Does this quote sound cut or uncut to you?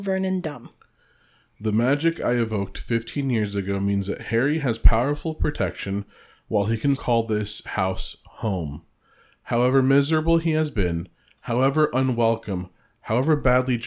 cut